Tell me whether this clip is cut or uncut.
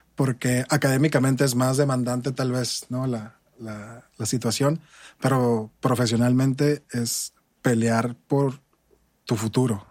uncut